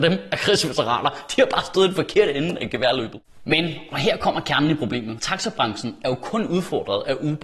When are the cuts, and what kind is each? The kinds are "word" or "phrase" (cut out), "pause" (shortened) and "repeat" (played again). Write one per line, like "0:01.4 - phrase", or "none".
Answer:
0:05.2 - word